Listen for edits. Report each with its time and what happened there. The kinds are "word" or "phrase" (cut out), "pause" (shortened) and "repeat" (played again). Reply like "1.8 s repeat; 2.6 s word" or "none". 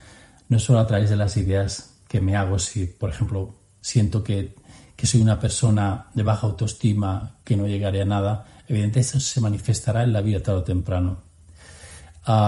none